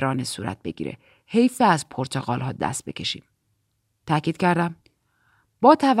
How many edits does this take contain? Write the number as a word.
zero